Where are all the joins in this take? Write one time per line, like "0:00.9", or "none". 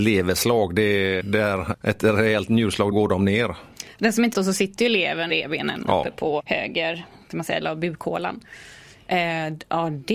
0:01.2
0:01.7
0:02.9
0:04.3
0:05.3
0:06.4
0:07.6